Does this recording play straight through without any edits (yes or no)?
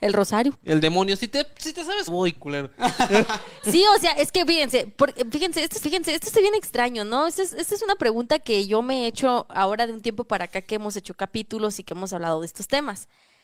no